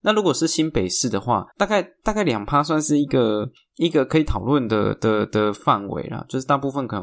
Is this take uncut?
no; 1 cut; at 1.5 s

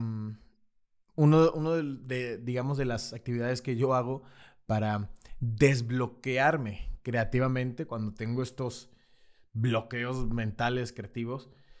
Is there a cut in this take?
no; 0 cuts

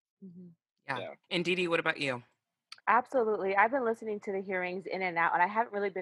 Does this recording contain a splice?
yes; 2 cuts; at 1.2 s, 2.8 s

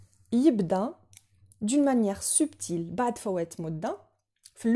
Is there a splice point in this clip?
no; 0 cuts

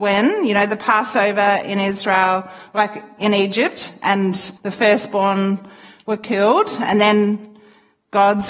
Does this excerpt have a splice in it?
yes; 1 cut; at 4.6 s

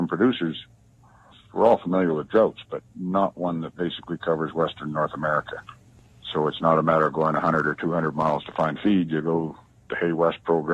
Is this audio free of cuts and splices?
yes; 0 cuts

